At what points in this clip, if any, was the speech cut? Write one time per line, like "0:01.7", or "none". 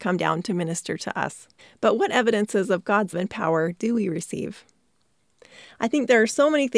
0:01.6
0:03.1